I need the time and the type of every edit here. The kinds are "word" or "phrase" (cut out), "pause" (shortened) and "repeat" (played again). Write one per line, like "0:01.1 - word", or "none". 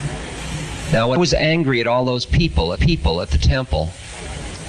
0:01.2 - word
0:02.7 - repeat